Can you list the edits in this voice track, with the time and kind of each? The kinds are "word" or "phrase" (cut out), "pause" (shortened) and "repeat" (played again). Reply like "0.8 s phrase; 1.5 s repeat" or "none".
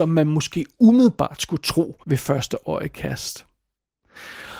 2.0 s pause